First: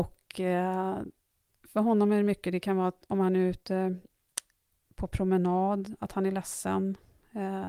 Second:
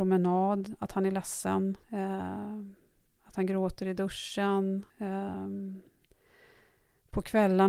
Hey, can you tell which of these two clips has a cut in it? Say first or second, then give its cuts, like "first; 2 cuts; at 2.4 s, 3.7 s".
second; 2 cuts; at 1.8 s, 4.9 s